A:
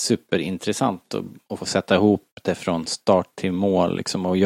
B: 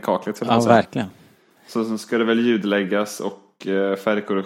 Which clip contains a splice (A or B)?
A